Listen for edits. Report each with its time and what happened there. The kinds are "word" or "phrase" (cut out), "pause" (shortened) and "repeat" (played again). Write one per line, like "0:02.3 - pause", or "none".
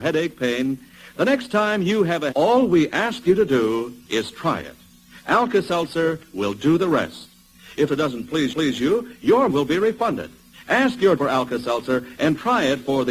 0:02.3 - word
0:07.9 - word
0:08.5 - repeat
0:09.5 - word
0:10.5 - pause
0:11.2 - word